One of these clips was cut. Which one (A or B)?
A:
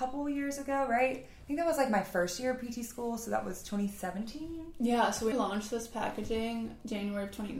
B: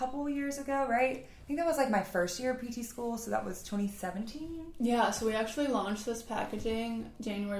A